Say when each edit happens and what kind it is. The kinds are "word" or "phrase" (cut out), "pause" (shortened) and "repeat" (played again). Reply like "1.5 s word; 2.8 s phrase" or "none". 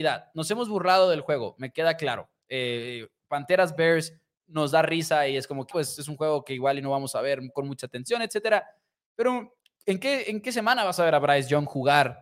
5.7 s word